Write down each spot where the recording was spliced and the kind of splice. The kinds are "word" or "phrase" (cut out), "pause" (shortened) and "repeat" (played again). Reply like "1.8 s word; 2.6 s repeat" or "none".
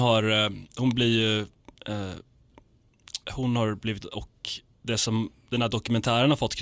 3.2 s pause; 4.0 s word